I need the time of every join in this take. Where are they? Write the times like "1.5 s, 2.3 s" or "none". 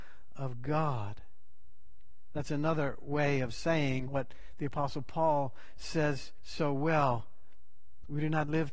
none